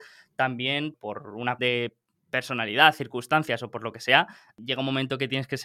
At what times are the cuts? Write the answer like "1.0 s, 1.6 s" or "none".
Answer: 1.6 s

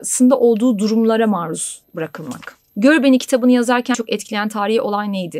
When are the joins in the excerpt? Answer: 1.9 s, 3.9 s

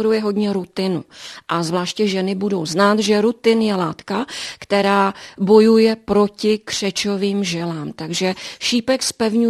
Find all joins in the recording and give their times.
none

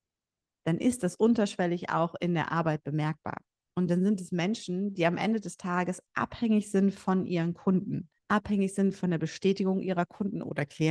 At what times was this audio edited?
8.2 s

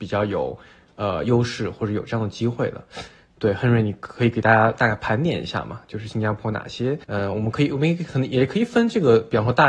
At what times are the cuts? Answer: 7.0 s

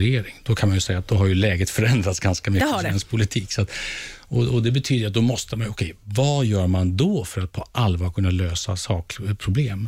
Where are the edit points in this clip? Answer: none

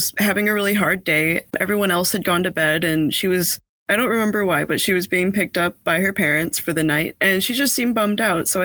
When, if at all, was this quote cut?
1.5 s

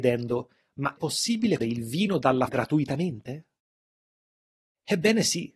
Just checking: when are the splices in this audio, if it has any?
1.0 s, 1.6 s, 2.5 s

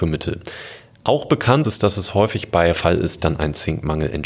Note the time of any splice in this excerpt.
1.6 s, 2.7 s, 3.2 s

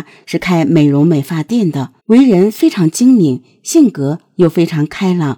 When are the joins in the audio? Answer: 2.0 s

